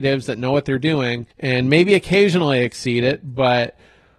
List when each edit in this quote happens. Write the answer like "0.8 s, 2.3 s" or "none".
1.3 s